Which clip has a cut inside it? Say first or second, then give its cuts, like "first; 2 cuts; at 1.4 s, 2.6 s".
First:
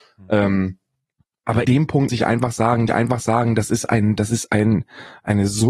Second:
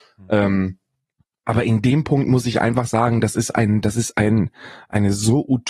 first; 3 cuts; at 1.6 s, 2.1 s, 2.9 s